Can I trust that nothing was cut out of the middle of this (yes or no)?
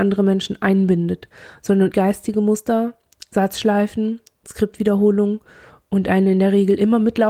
no